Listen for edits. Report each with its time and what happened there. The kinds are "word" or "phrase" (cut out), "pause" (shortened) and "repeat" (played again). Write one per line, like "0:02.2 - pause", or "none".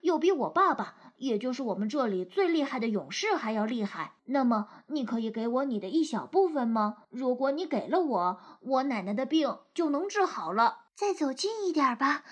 0:04.2 - pause
0:07.0 - pause
0:10.9 - pause